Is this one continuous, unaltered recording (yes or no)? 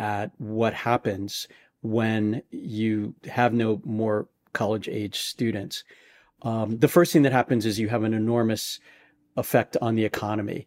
yes